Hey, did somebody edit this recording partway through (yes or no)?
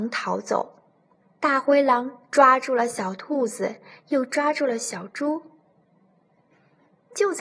yes